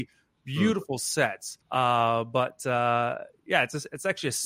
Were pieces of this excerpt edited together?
yes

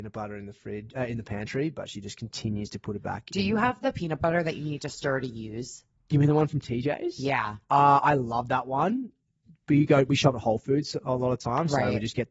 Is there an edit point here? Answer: no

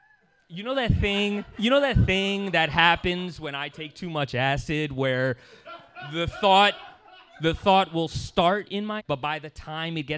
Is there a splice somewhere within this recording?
yes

